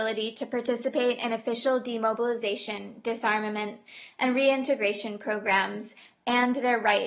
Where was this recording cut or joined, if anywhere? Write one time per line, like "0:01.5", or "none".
none